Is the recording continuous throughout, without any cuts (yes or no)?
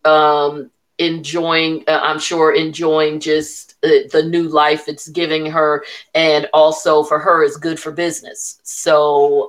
yes